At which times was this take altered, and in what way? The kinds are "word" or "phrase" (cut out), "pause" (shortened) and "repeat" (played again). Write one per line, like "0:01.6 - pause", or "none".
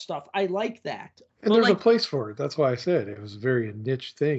none